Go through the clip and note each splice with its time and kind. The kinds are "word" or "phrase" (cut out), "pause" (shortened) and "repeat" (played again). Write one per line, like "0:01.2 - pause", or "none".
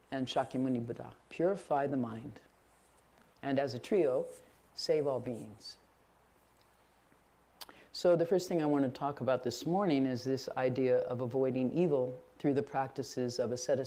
none